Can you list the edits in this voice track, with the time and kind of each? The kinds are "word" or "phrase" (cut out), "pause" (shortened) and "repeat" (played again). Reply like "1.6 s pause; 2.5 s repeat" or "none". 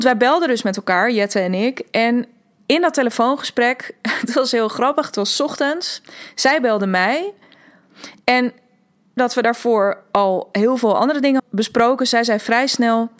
9.2 s word; 11.4 s word